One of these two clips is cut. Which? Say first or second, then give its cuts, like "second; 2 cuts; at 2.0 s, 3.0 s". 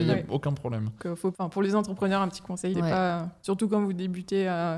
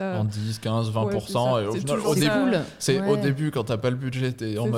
first; 3 cuts; at 1.0 s, 1.3 s, 2.7 s